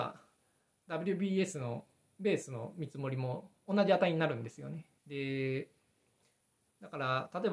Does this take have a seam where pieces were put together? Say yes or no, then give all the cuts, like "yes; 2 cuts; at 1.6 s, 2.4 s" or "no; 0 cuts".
yes; 2 cuts; at 3.6 s, 5.0 s